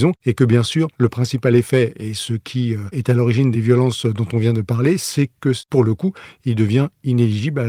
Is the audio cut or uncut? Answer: uncut